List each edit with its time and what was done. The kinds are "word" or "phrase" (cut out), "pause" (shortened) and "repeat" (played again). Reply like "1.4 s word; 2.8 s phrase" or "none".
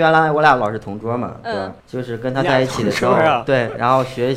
1.8 s pause